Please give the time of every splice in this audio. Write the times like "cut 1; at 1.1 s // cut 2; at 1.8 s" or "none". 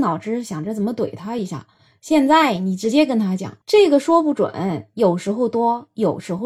cut 1; at 3.6 s